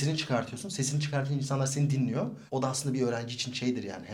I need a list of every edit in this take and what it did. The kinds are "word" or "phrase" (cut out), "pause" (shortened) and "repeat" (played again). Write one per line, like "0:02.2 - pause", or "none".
0:02.5 - pause